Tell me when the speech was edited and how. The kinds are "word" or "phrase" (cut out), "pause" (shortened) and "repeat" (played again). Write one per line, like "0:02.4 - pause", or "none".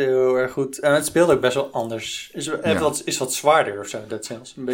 none